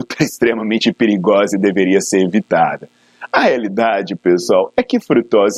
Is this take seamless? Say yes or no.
yes